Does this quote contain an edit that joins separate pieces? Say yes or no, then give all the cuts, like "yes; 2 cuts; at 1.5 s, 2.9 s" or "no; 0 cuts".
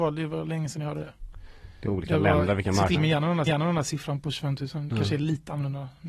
yes; 3 cuts; at 1.8 s, 2.9 s, 3.5 s